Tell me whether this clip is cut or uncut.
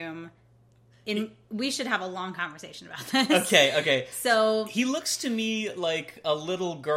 uncut